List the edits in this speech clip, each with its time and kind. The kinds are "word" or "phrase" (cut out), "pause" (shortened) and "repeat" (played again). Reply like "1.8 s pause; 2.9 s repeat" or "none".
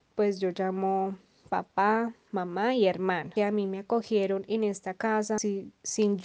3.4 s word